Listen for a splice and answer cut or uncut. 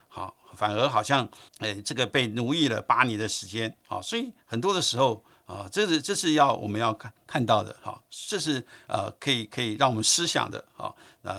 cut